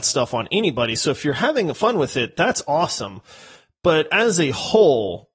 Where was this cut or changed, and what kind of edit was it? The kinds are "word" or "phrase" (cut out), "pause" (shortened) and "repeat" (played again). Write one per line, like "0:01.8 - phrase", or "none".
none